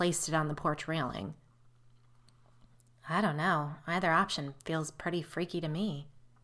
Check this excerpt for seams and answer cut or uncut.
uncut